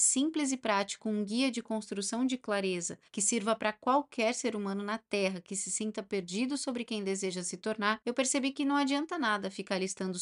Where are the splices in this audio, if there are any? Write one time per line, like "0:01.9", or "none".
0:03.1
0:08.0